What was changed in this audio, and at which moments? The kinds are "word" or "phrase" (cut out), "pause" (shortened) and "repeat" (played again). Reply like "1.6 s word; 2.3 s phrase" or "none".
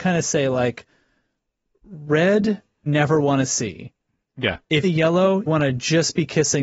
2.9 s word; 4.8 s phrase; 5.5 s word